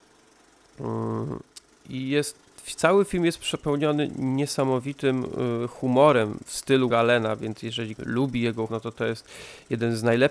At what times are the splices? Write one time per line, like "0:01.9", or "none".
0:06.9
0:08.0
0:08.7